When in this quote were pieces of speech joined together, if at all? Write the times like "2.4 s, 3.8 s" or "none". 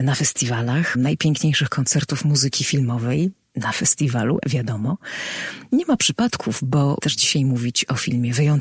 0.9 s, 4.4 s, 7.0 s